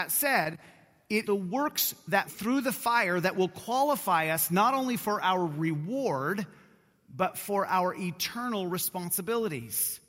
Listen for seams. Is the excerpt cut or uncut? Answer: cut